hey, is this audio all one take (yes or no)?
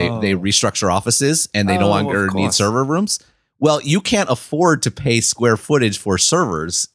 yes